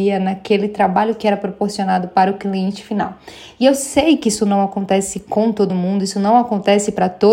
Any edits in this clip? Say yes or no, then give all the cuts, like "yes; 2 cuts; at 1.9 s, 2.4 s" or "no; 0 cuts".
no; 0 cuts